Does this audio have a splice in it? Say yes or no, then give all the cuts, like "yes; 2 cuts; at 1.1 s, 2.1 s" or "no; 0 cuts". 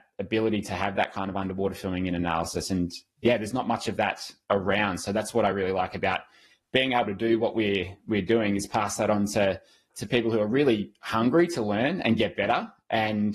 no; 0 cuts